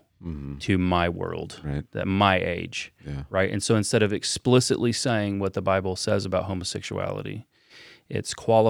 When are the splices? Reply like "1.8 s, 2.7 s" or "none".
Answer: none